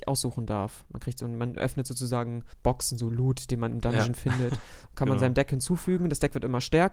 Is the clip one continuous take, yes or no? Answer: no